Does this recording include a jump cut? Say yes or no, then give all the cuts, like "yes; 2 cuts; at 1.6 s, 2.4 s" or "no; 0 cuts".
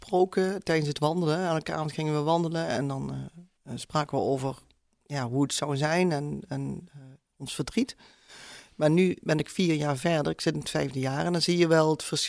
yes; 1 cut; at 3.6 s